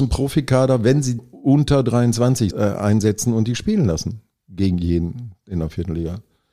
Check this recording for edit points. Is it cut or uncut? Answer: cut